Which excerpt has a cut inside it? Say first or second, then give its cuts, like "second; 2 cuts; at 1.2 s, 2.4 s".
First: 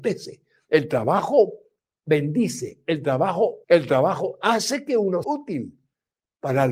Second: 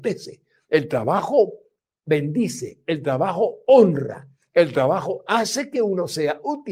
first; 2 cuts; at 3.6 s, 5.2 s